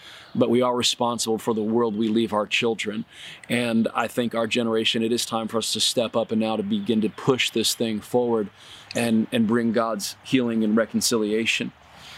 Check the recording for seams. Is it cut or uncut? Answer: uncut